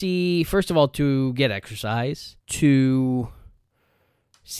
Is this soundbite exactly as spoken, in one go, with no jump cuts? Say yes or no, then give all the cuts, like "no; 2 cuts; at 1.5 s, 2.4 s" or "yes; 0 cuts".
no; 1 cut; at 2.4 s